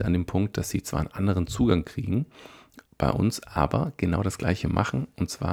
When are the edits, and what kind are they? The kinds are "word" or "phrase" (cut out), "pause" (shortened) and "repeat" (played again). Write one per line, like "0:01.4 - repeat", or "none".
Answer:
0:02.9 - pause